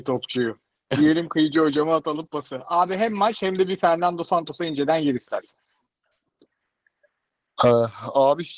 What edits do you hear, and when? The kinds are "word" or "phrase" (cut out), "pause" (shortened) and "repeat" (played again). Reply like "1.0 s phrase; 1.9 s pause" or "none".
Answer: none